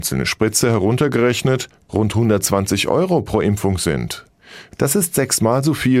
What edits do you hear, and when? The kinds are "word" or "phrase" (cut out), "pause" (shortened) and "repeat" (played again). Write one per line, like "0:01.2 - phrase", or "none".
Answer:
none

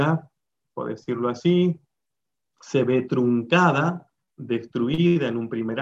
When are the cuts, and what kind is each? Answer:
none

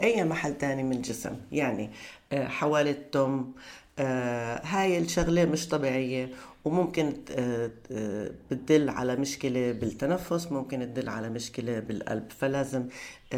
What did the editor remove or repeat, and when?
0:02.8 - phrase

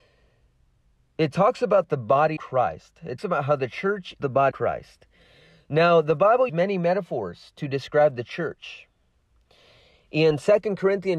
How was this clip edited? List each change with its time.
0:02.4 - word
0:03.2 - word
0:04.2 - word
0:04.5 - word
0:06.5 - word

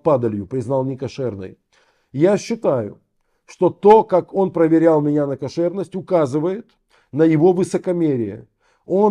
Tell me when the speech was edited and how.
none

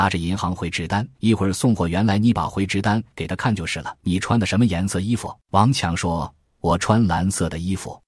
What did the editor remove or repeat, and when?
0:01.1 - pause
0:04.0 - pause
0:05.4 - pause

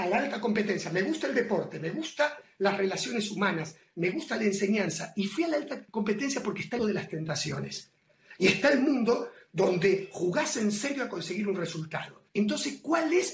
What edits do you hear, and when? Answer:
0:05.9 - pause
0:06.8 - word
0:12.3 - pause

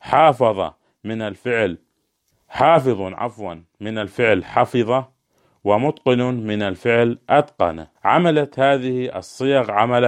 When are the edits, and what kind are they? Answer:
0:07.9 - pause

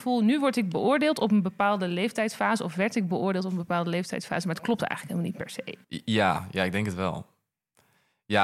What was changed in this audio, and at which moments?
0:05.8 - pause

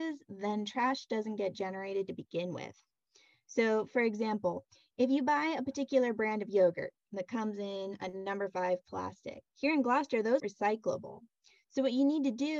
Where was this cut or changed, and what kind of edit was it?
0:09.5 - pause
0:10.4 - word

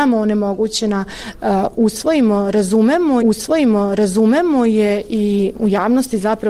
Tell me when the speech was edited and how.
0:03.2 - repeat
0:05.5 - word

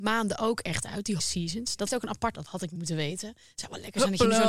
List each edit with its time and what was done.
0:01.2 - word
0:01.9 - word
0:02.3 - word
0:02.8 - word

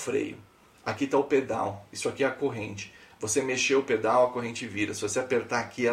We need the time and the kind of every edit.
none

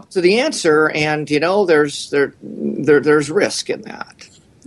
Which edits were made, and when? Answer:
none

